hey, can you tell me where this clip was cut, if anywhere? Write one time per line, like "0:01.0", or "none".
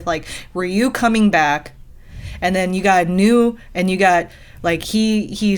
none